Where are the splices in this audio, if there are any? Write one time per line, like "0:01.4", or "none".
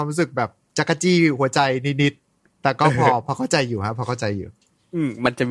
none